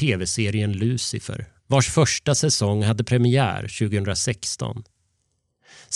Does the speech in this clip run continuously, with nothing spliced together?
no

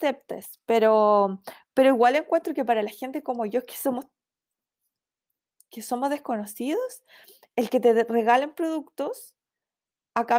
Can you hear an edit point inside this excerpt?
no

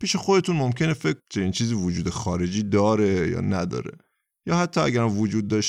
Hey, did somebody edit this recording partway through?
yes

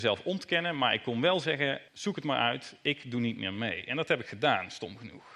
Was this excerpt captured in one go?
no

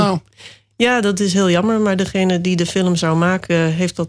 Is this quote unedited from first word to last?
yes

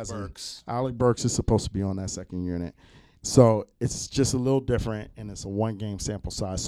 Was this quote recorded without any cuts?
yes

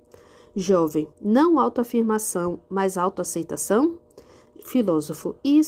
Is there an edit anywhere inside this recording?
yes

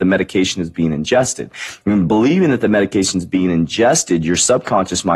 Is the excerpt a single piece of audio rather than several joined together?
yes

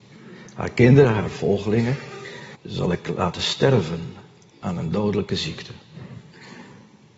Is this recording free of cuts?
no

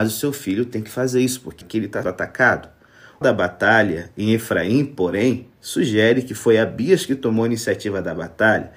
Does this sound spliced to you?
yes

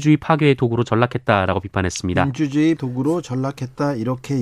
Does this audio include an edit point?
yes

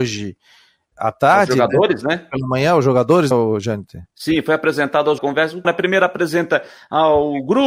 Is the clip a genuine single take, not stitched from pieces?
no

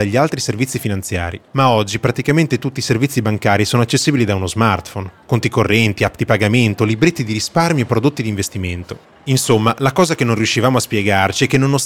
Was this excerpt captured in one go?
no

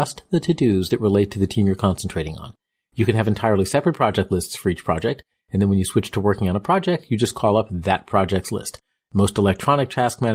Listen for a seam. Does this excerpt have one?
no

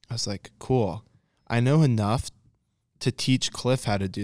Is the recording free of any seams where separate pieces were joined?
yes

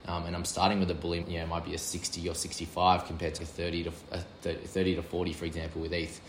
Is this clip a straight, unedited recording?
no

